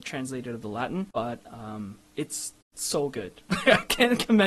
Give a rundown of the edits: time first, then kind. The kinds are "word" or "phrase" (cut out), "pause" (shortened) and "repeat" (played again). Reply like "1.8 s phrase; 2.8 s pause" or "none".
1.1 s pause; 2.6 s pause